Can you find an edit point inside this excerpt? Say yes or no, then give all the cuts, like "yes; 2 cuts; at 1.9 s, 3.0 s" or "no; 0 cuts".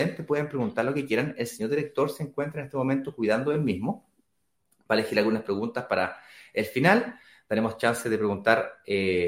no; 0 cuts